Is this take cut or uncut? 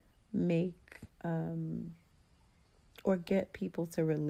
cut